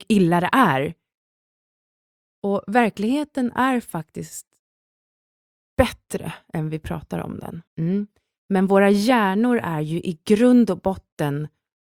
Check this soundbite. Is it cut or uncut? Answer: cut